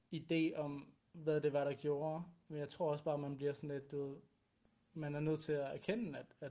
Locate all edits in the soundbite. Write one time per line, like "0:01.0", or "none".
0:01.0
0:04.6